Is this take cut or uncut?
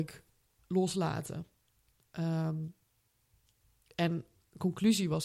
uncut